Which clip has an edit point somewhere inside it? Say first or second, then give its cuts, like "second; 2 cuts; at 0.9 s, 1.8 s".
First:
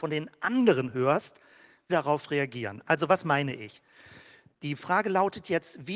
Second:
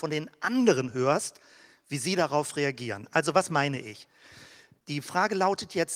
first; 1 cut; at 1.9 s